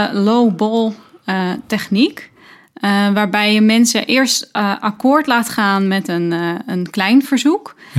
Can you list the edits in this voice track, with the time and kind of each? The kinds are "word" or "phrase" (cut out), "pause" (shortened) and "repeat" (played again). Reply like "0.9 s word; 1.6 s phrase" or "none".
none